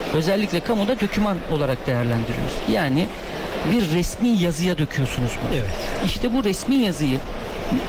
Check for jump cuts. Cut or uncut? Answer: uncut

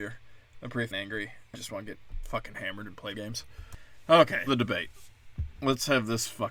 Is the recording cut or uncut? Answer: cut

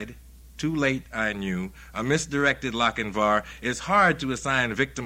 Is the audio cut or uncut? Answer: uncut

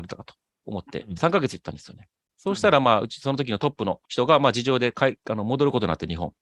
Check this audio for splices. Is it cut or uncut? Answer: cut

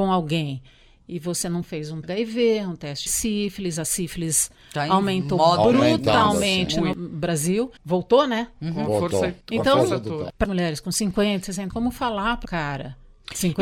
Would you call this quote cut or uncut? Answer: cut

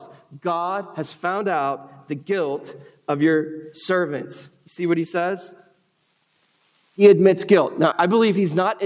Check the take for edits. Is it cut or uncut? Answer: cut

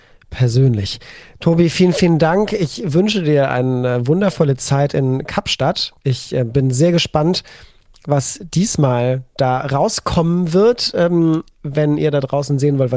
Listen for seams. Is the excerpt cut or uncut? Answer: uncut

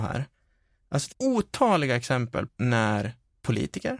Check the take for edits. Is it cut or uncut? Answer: cut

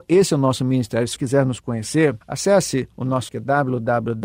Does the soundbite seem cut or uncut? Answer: cut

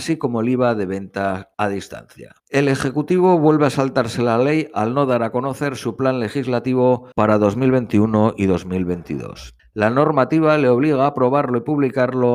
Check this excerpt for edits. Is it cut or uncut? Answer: cut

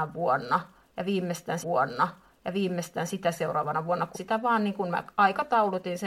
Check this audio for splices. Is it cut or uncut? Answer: cut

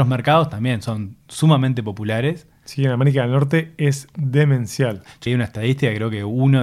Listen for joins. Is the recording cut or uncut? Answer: cut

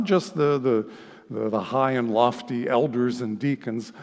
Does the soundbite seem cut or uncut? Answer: uncut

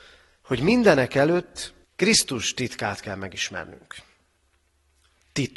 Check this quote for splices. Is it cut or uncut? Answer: cut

